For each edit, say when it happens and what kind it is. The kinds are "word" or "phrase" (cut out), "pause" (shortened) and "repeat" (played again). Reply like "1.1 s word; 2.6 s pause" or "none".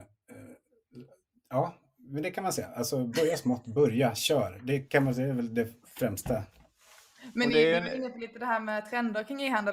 none